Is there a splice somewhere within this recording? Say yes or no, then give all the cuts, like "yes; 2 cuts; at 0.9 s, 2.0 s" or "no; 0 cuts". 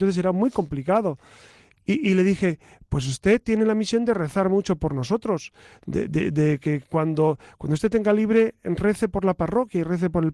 no; 0 cuts